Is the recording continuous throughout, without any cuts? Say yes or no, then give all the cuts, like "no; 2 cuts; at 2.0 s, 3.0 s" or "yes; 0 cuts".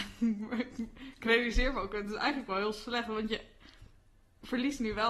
yes; 0 cuts